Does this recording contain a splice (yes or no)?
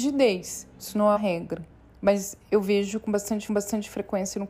yes